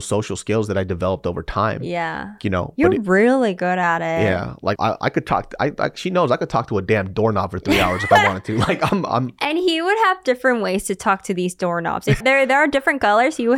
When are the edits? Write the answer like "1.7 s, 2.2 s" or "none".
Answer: 4.8 s, 12.2 s